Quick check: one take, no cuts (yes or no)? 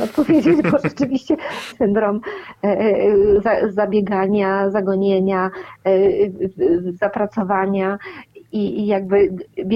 no